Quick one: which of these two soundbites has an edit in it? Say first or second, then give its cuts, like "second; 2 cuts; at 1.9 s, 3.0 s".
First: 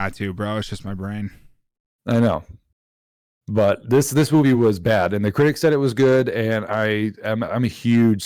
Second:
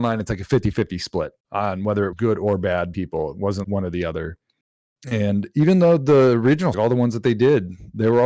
second; 6 cuts; at 1.4 s, 2.1 s, 2.9 s, 3.6 s, 4.9 s, 6.7 s